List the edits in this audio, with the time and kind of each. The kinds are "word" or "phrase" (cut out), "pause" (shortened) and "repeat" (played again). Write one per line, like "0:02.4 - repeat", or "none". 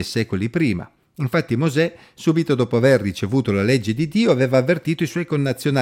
none